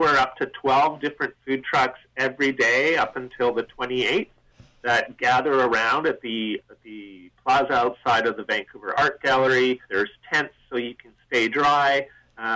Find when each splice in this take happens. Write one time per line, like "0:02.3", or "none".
0:06.6
0:09.8